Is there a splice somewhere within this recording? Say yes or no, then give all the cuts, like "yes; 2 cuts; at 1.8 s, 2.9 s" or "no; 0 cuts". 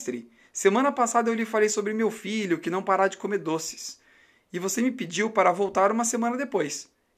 no; 0 cuts